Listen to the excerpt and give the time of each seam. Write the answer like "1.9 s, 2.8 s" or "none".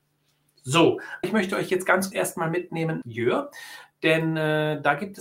1.2 s, 2.1 s, 3.0 s